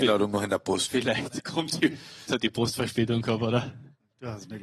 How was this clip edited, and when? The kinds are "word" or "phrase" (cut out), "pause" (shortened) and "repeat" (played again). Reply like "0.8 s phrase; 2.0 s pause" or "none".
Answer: 2.3 s word